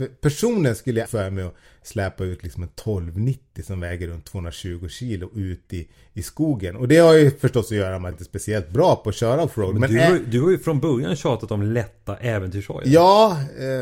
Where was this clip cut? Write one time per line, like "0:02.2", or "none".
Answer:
0:01.1
0:08.1

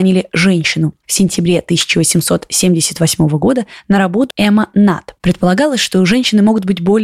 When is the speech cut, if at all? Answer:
0:04.3
0:05.2

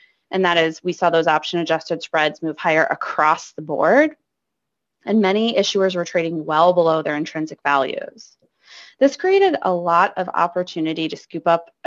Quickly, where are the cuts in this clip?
none

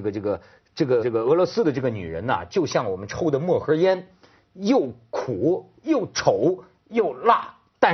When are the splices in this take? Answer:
0:01.0

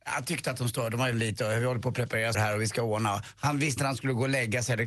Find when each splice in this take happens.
0:01.1
0:02.3
0:03.8

